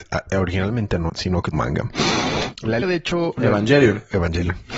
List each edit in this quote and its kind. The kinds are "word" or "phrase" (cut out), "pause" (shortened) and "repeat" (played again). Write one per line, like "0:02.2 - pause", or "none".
0:01.1 - phrase
0:01.5 - word
0:02.8 - word